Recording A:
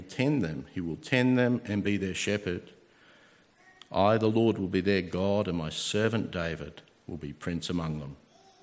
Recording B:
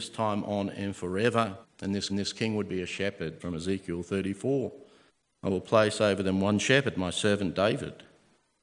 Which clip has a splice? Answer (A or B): B